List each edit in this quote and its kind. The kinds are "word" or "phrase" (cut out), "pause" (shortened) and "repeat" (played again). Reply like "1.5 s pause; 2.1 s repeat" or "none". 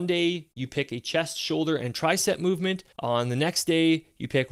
2.9 s pause